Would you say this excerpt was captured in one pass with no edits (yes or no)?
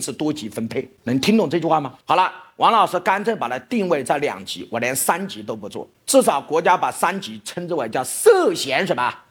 no